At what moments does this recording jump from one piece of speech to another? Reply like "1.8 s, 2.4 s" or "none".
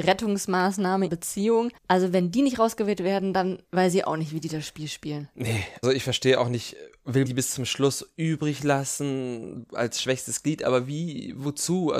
1.1 s, 1.8 s, 3.7 s, 5.8 s, 7.2 s